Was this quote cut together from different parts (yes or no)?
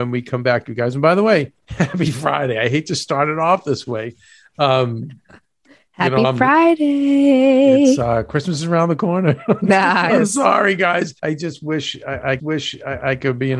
yes